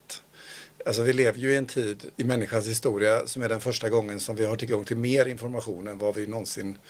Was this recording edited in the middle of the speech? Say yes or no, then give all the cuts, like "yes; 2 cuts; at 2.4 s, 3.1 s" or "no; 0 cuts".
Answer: yes; 1 cut; at 2.1 s